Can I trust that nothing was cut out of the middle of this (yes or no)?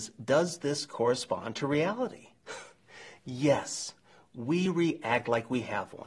yes